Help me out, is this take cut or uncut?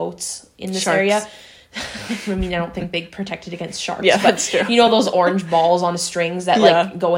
uncut